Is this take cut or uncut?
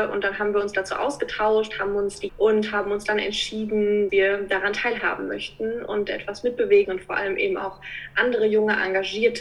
cut